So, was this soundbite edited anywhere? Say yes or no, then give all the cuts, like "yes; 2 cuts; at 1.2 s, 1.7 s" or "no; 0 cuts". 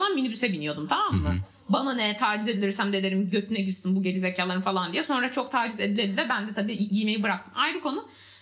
no; 0 cuts